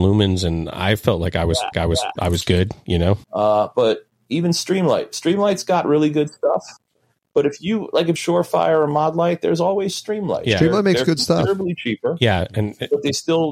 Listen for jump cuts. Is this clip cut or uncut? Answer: cut